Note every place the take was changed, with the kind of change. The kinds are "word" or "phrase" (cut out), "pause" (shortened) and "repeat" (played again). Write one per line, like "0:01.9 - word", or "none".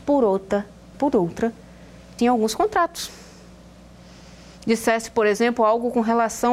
0:00.9 - word
0:02.2 - word

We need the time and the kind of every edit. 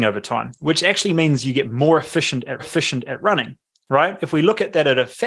0:02.6 - repeat

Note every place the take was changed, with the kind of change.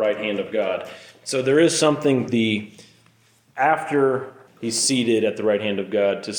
0:02.3 - word
0:04.5 - word

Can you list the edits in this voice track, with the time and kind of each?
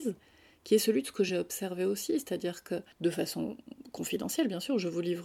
none

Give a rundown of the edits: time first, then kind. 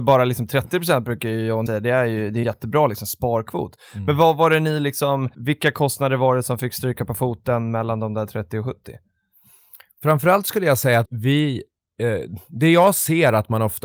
0:01.7 - word
0:02.4 - word
0:05.3 - pause
0:11.0 - word

